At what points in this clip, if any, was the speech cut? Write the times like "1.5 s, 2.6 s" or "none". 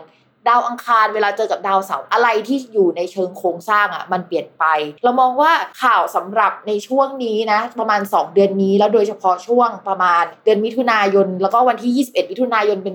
5.0 s, 5.7 s